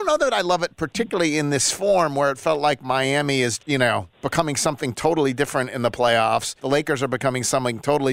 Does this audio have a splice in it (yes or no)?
yes